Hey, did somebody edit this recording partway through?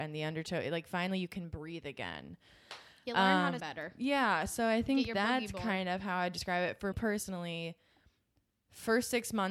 yes; 2 cuts; at 3.6 s, 6.9 s

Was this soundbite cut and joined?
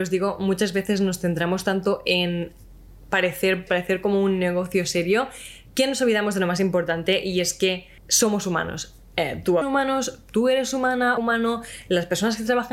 yes; 4 cuts; at 3.7 s, 8.0 s, 9.6 s, 11.2 s

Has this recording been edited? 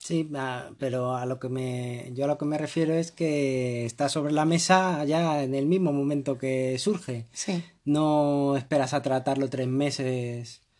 no; 0 cuts

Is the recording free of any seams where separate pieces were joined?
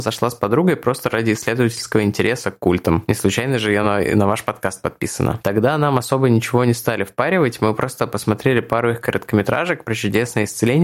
yes; 0 cuts

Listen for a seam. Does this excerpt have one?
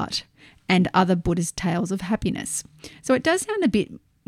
no; 0 cuts

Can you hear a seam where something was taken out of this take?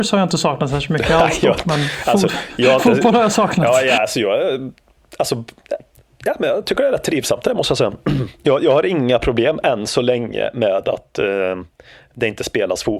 no; 0 cuts

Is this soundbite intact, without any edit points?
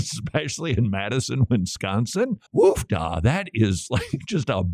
no; 1 cut; at 2.5 s

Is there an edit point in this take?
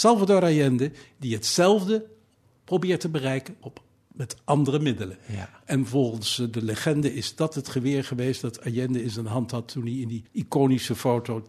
yes; 2 cuts; at 3.6 s, 10.3 s

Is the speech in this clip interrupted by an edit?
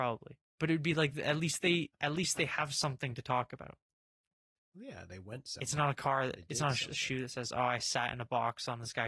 no; 0 cuts

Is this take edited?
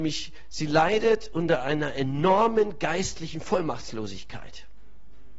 no; 0 cuts

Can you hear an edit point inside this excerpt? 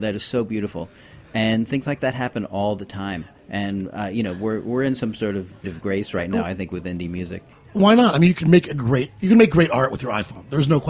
yes; 2 cuts; at 5.6 s, 7.5 s

